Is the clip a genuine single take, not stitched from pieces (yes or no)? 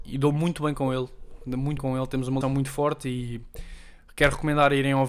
no